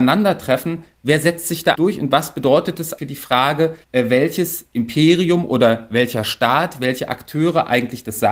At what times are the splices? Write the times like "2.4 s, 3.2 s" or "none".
1.7 s, 3.0 s, 3.8 s

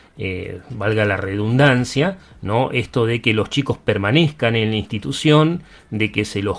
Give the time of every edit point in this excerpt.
none

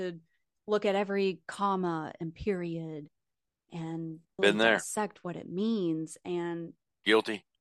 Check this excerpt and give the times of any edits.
4.4 s

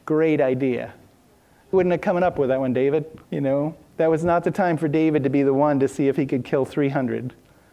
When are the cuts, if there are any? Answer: 1.7 s, 3.2 s

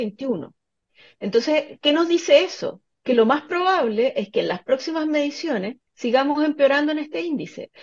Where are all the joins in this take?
5.9 s

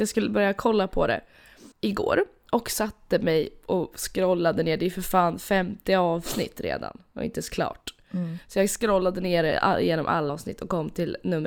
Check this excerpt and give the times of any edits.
1.7 s, 10.3 s

